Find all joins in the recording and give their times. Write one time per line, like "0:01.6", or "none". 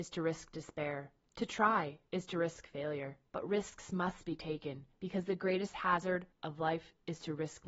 0:01.3
0:03.3
0:04.9

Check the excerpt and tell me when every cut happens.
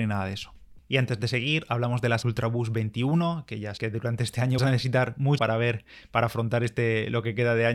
0:02.2
0:03.8
0:04.6
0:05.4

